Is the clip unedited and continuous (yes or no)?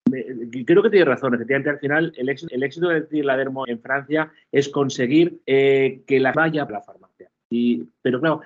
no